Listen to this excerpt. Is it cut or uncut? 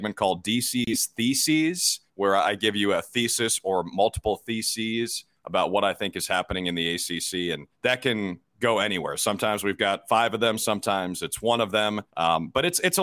cut